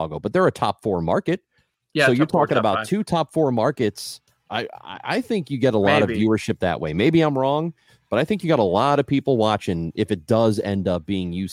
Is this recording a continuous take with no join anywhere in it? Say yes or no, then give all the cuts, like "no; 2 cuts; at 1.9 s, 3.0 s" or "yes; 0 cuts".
yes; 0 cuts